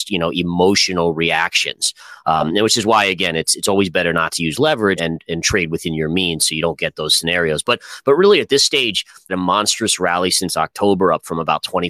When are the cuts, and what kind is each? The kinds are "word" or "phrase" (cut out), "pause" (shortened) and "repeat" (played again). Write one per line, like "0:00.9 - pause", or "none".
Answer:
0:05.0 - word
0:09.3 - phrase

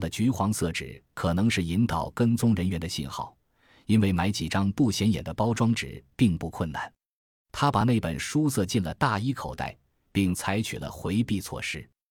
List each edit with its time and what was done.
none

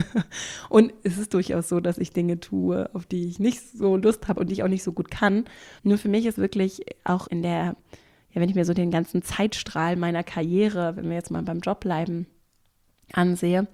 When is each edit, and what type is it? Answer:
0:05.8 - pause
0:06.3 - word
0:07.3 - word

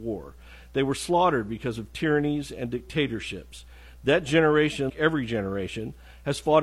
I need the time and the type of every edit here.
0:04.9 - word

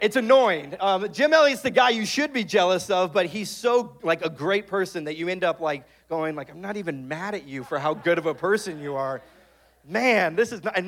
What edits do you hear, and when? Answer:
none

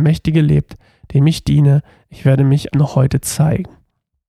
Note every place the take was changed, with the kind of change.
0:02.7 - word

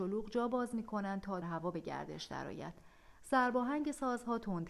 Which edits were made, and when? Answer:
0:01.4 - phrase

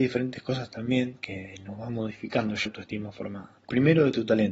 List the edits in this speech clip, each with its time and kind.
0:02.7 - word

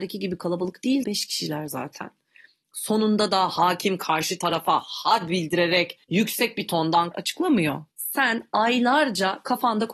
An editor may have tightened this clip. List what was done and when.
0:01.0 - word
0:06.0 - pause
0:07.1 - word
0:07.9 - pause

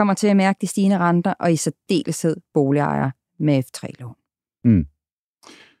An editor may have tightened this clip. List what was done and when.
none

